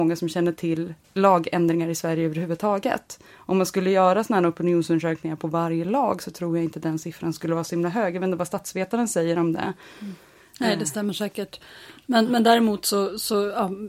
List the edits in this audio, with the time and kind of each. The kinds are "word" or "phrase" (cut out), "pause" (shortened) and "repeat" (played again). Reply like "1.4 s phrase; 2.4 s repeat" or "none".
1.0 s pause